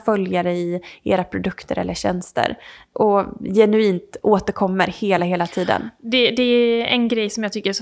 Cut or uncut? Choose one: uncut